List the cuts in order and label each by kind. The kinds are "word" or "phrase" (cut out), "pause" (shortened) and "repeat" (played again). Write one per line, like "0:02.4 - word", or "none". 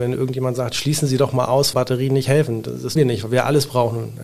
0:01.7 - word
0:03.0 - word